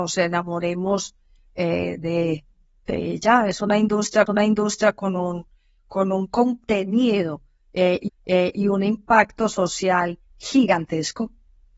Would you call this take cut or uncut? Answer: cut